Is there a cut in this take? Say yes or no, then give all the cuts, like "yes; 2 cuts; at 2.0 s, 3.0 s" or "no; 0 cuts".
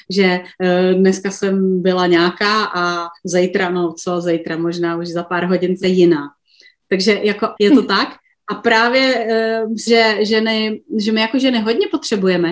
yes; 3 cuts; at 5.8 s, 7.6 s, 9.9 s